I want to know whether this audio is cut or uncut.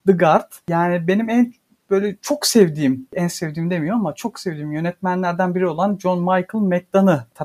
uncut